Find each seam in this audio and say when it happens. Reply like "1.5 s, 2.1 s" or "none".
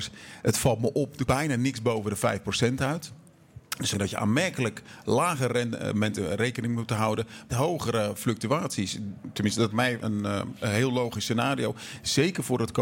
1.3 s, 3.9 s, 7.5 s, 9.7 s, 10.0 s, 10.6 s

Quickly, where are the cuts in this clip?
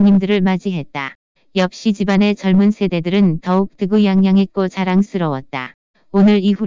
none

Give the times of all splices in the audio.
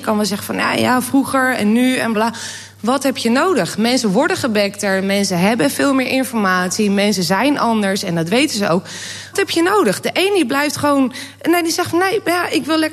2.1 s, 9.3 s

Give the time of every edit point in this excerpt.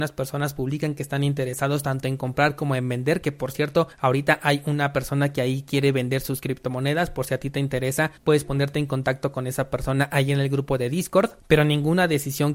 3.9 s, 8.2 s, 11.4 s

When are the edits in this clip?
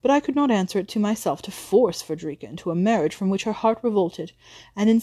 none

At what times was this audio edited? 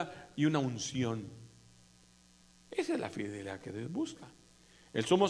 none

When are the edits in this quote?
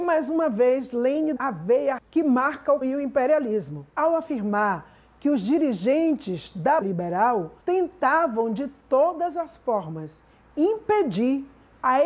1.4 s, 2.0 s, 2.8 s, 3.9 s, 6.8 s, 7.6 s

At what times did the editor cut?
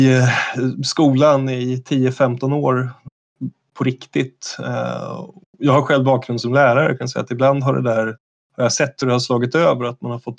none

